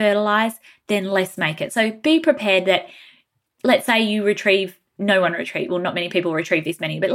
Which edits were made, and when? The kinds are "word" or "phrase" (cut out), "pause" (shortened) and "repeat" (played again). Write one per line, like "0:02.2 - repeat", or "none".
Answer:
none